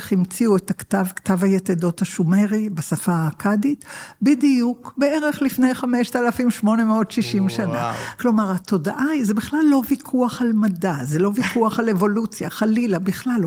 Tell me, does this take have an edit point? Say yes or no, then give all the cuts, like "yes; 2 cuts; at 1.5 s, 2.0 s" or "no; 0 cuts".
no; 0 cuts